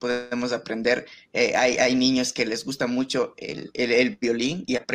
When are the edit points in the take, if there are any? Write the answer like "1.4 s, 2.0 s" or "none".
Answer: none